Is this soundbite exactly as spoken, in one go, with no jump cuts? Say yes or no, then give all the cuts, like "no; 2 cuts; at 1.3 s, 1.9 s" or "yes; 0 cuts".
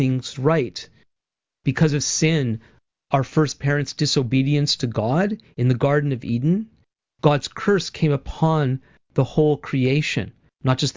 yes; 0 cuts